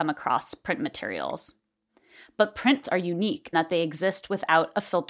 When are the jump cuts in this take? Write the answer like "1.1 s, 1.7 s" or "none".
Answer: 2.8 s, 3.5 s